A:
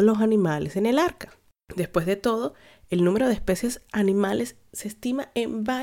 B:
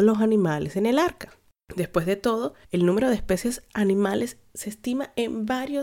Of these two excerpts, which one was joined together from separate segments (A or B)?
B